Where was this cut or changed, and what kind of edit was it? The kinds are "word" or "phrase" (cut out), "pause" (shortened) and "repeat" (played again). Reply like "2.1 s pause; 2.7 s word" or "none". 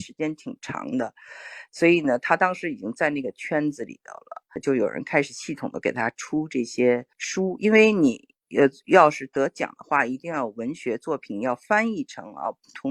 7.1 s pause